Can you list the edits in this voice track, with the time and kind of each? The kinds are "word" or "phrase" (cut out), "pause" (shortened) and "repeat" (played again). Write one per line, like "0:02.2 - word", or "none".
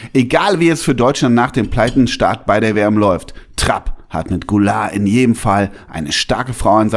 none